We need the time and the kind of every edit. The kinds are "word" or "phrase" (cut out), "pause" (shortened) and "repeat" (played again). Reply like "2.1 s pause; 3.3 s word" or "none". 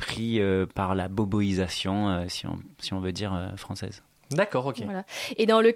none

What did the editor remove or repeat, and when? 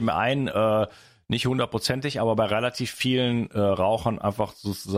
none

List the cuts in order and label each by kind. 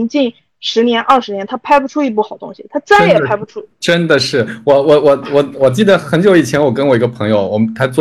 3.7 s pause

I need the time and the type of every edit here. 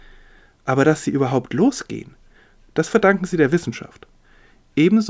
none

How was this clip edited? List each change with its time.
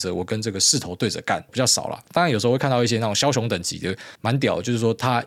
1.5 s word; 4.2 s pause

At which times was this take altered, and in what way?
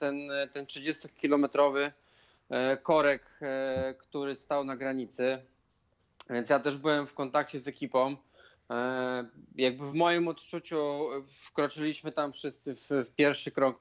none

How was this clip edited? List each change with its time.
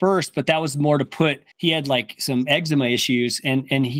1.5 s pause

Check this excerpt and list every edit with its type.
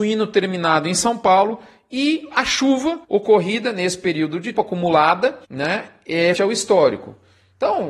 3.0 s pause; 4.5 s word; 5.4 s pause; 6.3 s word

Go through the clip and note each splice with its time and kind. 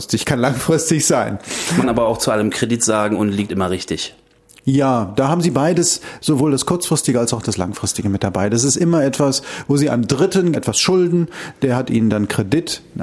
1.8 s word; 3.5 s word; 10.5 s word

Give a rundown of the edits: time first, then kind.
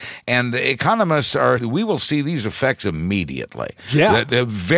1.6 s word

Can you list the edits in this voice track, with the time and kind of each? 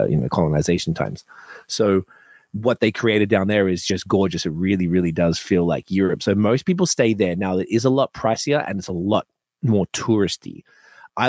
none

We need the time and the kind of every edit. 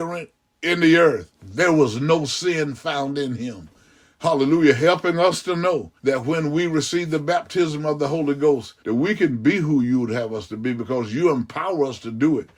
1.3 s pause; 6.0 s pause; 8.8 s pause

